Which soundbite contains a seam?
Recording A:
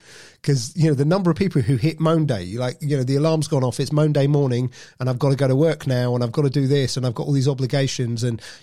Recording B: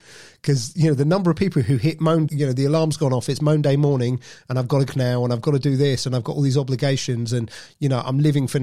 B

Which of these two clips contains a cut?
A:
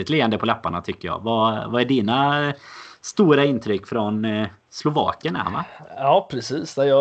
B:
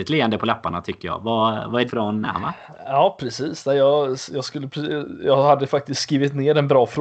B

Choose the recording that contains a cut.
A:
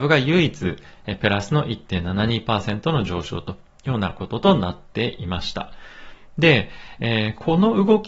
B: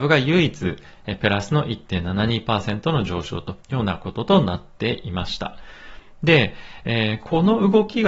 B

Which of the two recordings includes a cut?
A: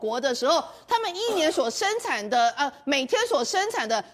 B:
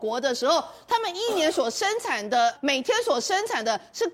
B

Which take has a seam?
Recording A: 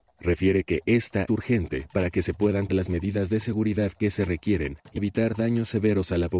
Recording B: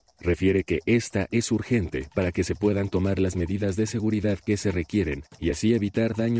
A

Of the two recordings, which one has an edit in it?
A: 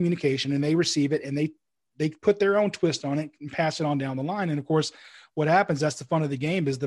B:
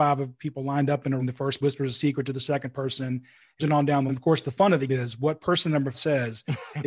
B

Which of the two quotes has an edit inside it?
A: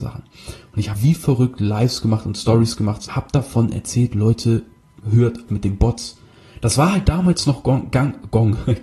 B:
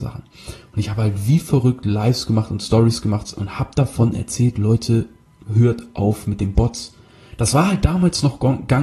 A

